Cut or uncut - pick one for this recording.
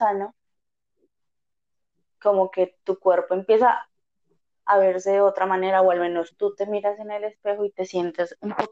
uncut